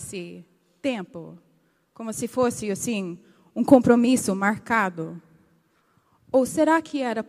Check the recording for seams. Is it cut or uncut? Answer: uncut